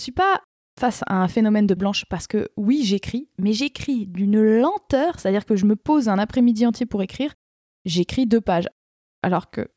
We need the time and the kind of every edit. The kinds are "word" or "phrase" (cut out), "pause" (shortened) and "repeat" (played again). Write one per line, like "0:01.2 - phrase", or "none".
0:01.8 - word

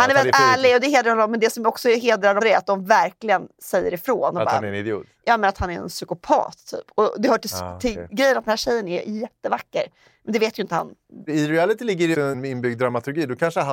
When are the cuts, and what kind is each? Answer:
0:02.4 - word
0:12.1 - word

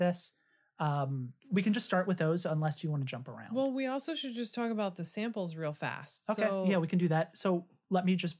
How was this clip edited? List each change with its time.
0:01.4 - pause

